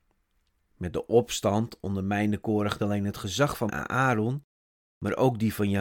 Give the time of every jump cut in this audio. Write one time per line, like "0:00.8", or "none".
0:02.8
0:03.7